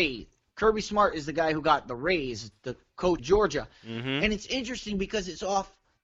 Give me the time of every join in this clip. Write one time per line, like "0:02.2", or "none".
0:03.2